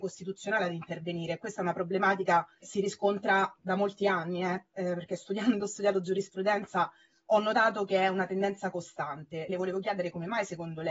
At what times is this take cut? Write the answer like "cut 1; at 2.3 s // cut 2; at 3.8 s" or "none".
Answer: cut 1; at 2.6 s // cut 2; at 5.6 s // cut 3; at 9.5 s